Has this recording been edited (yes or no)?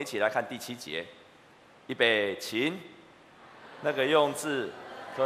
no